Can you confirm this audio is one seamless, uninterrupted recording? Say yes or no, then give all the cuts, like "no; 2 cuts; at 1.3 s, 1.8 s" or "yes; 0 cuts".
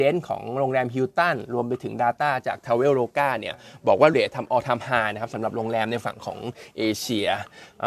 no; 1 cut; at 4.1 s